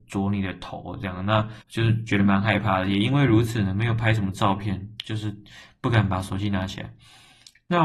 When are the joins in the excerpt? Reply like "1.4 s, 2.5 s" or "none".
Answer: 1.6 s